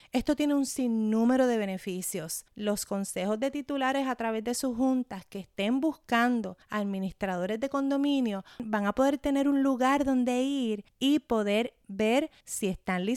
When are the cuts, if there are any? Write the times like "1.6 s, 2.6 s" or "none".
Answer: 2.5 s, 6.6 s